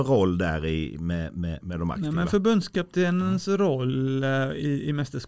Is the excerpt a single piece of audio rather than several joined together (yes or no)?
yes